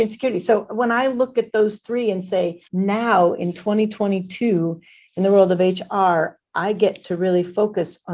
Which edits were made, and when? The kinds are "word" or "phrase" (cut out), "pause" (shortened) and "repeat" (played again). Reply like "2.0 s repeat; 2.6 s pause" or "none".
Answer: 2.7 s pause